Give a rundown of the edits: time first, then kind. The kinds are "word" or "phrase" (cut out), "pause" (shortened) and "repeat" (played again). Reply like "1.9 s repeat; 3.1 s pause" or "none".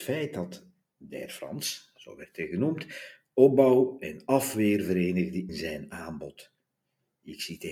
5.5 s word